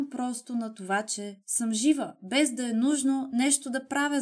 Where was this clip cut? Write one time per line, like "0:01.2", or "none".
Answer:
none